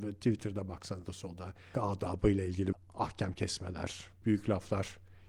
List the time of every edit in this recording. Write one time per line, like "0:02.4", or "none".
0:01.1
0:01.7
0:02.7
0:04.2